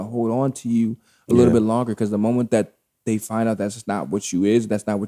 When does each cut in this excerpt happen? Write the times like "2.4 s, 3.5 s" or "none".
none